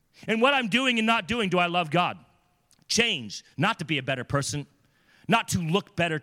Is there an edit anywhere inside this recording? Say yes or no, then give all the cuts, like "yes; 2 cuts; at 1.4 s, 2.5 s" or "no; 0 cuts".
yes; 1 cut; at 3.5 s